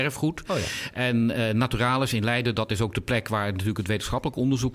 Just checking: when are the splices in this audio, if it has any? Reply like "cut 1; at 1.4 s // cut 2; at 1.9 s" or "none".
none